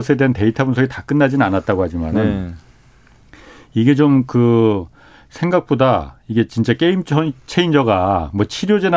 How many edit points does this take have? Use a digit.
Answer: 0